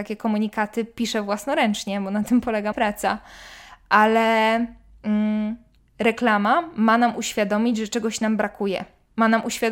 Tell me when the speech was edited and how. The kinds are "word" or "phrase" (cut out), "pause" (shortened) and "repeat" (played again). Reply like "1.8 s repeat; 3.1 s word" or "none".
2.7 s word; 5.8 s pause